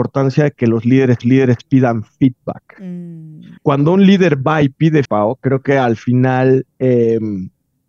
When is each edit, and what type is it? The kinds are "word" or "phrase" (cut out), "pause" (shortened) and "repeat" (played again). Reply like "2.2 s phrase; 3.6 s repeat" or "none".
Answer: 1.2 s repeat; 3.6 s pause; 5.0 s word; 6.7 s pause